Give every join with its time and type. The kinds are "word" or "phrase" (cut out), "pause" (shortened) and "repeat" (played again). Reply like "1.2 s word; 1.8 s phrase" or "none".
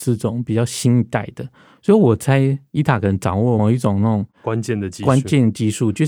none